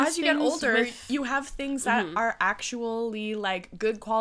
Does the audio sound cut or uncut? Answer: uncut